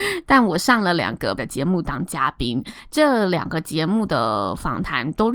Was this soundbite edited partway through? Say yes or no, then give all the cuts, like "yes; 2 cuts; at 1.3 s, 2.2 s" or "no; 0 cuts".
yes; 1 cut; at 1.4 s